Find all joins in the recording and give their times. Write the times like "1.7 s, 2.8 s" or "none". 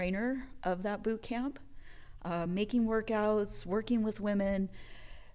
none